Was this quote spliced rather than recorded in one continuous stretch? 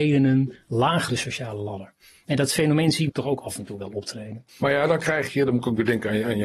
yes; 3 cuts; at 1.1 s, 3.1 s, 4.5 s

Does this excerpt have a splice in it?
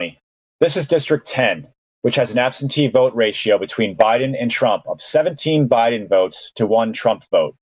no; 0 cuts

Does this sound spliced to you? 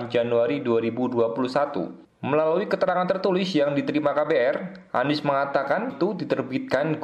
yes; 1 cut; at 5.9 s

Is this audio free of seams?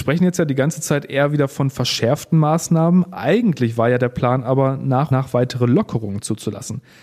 no; 1 cut; at 5.1 s

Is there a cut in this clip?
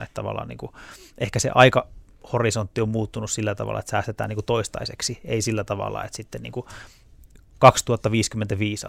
no; 0 cuts

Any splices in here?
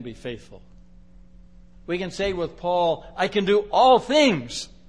no; 0 cuts

